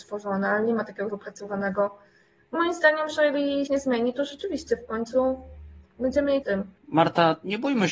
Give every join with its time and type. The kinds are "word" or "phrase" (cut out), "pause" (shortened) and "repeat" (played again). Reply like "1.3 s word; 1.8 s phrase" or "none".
1.1 s word; 2.5 s word; 3.7 s phrase; 6.4 s phrase; 6.8 s pause